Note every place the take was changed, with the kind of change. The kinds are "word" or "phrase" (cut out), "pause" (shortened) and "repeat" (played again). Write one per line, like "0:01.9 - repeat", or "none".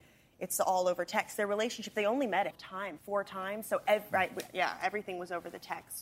0:02.5 - word
0:03.0 - word

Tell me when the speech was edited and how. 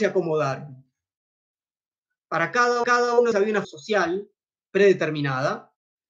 0:02.8 - repeat
0:03.3 - word
0:03.6 - word

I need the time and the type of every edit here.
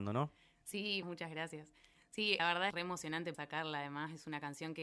0:01.0 - word
0:02.4 - word
0:02.7 - word
0:03.3 - word

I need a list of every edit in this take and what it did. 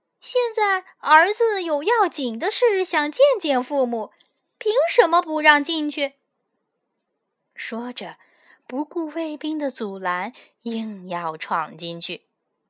none

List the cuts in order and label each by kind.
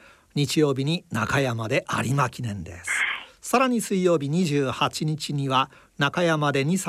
none

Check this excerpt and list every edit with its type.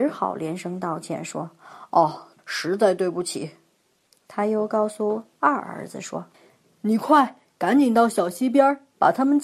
0:02.4 - phrase
0:06.3 - pause

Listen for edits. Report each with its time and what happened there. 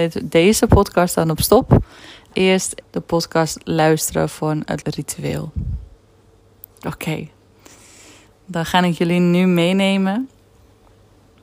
0:02.3 - word
0:02.8 - word
0:04.8 - word

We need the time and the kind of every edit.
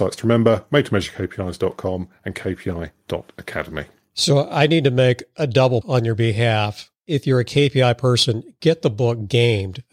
0:05.8 - word

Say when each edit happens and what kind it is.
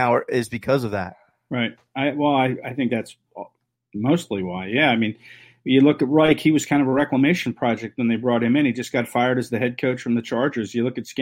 none

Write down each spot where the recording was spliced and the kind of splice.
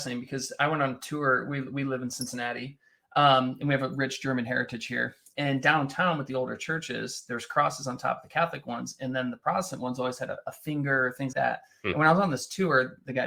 0:11.3 - word

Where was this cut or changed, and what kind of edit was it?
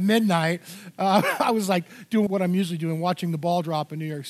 0:02.3 - word

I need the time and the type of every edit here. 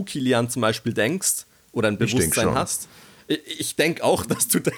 none

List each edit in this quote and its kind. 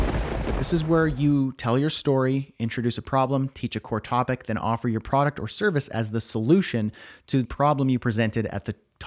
0:07.4 - word

